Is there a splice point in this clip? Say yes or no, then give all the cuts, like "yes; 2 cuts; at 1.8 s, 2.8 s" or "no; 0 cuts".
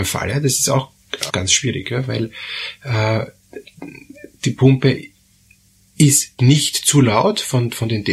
yes; 2 cuts; at 1.3 s, 6.4 s